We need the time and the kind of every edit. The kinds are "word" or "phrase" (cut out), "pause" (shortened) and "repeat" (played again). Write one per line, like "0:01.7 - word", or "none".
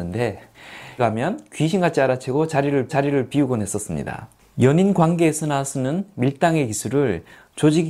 0:01.0 - word
0:02.9 - repeat
0:04.4 - pause